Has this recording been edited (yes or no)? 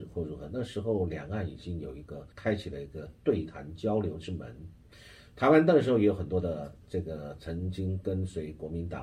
yes